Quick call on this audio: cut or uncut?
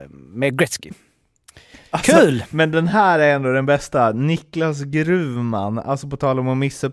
uncut